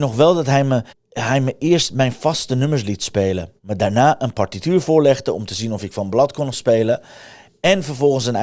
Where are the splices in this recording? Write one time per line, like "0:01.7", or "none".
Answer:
0:00.9
0:03.6